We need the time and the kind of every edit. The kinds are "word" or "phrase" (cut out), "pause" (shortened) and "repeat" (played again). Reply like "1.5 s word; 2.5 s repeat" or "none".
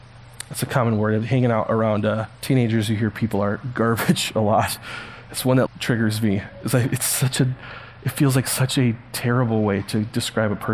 2.3 s pause; 5.7 s word

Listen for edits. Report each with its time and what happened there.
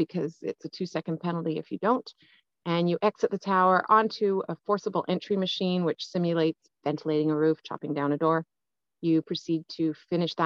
none

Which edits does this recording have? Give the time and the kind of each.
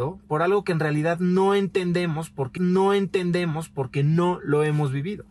2.6 s repeat

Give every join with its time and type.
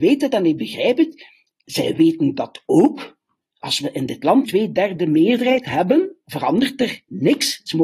4.4 s word

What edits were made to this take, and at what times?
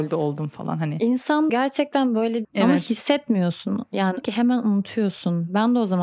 1.5 s word; 2.4 s phrase; 4.2 s phrase

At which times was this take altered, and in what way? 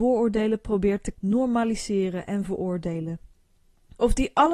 1.1 s word

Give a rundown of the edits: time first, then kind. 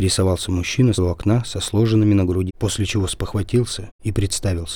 0.9 s word; 2.5 s word

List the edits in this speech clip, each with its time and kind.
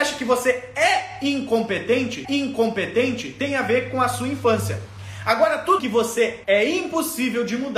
2.2 s repeat; 5.8 s word; 6.4 s word

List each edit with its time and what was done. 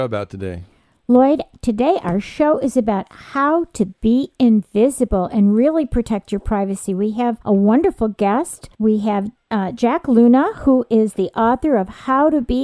7.4 s pause; 8.7 s pause; 9.4 s pause

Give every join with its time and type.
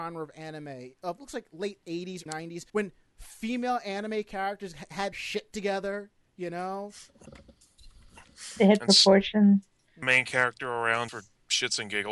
1.2 s word; 2.3 s word; 2.7 s pause; 5.1 s word; 10.0 s phrase; 11.1 s word

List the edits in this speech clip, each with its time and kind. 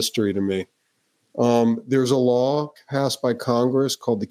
none

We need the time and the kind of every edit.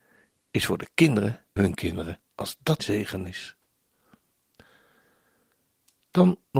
1.6 s word; 2.3 s pause; 2.8 s word

